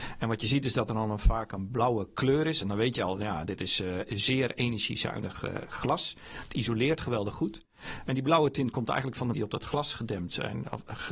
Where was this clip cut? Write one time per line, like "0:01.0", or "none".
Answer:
0:09.3

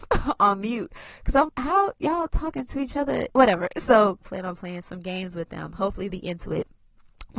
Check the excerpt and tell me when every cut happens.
0:01.5
0:03.3
0:04.2
0:06.1

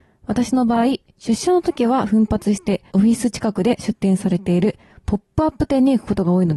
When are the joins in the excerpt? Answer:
none

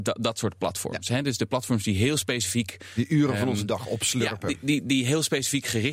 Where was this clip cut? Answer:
none

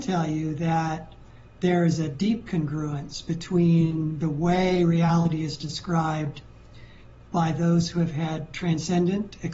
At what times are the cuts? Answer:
none

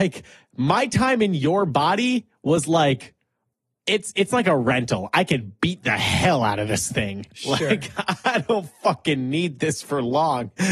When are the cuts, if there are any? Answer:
none

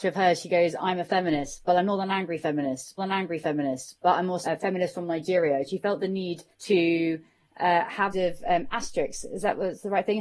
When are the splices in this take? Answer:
0:03.0
0:04.4
0:06.5
0:08.1

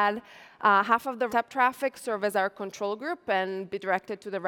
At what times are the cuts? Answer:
0:01.3

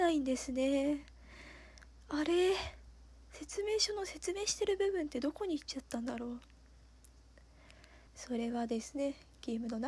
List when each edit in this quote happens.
0:08.1

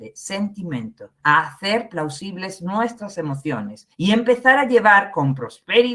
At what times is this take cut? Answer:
0:01.2
0:03.9

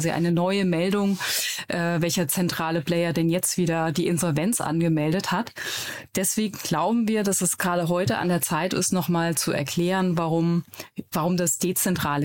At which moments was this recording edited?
0:11.1

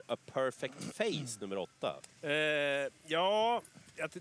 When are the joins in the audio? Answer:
0:02.2

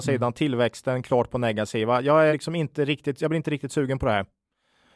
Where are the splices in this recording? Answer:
0:02.3

